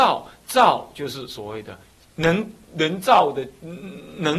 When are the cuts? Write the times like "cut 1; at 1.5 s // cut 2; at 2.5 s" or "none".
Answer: none